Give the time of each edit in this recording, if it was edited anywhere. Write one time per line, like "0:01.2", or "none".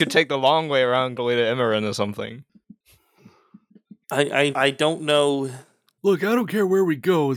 0:01.2
0:04.0
0:04.5